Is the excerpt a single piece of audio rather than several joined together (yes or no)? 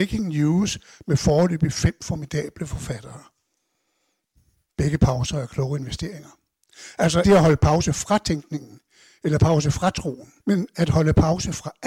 no